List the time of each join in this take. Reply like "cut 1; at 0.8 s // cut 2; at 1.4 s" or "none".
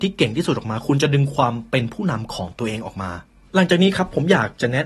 cut 1; at 3.3 s